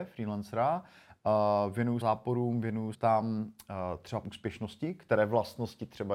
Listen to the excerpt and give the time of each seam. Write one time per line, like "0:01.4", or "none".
0:02.0
0:02.9
0:04.2